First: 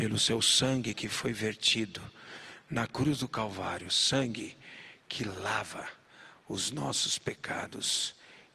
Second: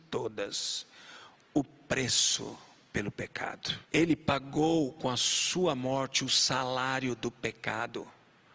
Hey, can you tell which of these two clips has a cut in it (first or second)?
second